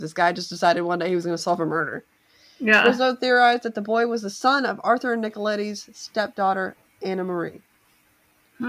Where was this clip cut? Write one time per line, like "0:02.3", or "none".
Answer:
none